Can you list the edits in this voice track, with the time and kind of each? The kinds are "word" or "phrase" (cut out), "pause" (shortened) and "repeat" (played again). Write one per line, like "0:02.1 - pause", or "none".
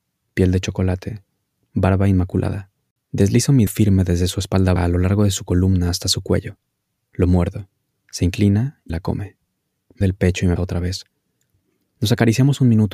0:03.7 - word
0:04.8 - word
0:08.9 - word
0:10.0 - word
0:10.6 - word